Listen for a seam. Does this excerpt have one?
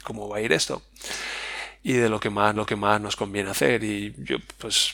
yes; 1 cut; at 2.6 s

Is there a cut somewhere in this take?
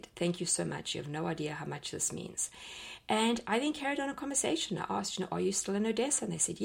no; 0 cuts

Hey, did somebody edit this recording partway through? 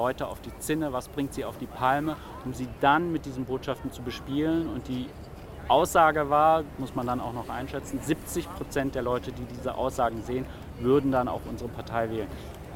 no; 0 cuts

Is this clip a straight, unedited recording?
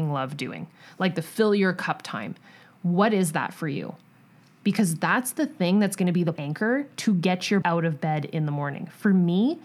no; 2 cuts; at 6.4 s, 7.6 s

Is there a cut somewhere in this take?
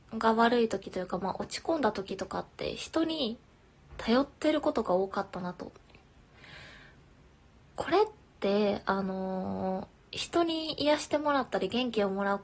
no; 0 cuts

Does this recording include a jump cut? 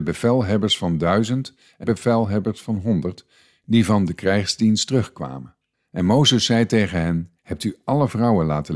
yes; 3 cuts; at 1.8 s, 5.7 s, 7.4 s

